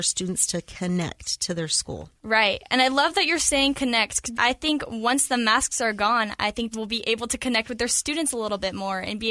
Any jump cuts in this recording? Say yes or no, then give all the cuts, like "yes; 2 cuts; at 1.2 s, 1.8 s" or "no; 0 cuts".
yes; 2 cuts; at 4.3 s, 6.7 s